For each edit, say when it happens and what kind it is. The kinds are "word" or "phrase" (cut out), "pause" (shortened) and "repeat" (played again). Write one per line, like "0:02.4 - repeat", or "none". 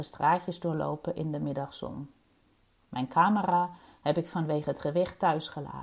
none

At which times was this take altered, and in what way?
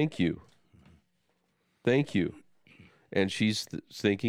none

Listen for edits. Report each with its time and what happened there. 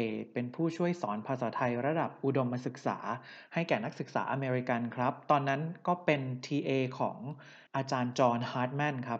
0:07.7 - pause

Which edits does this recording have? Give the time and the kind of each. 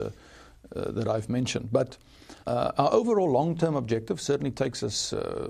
0:02.4 - pause

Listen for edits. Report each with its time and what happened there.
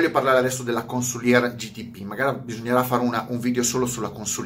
none

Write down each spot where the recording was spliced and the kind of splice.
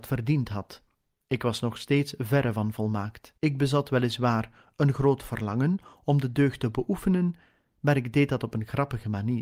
0:00.9 - pause
0:03.4 - pause

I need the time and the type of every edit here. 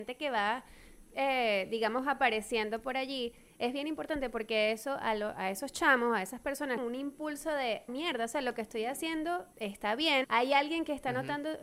0:06.8 - phrase
0:07.9 - word
0:09.5 - pause
0:10.2 - word

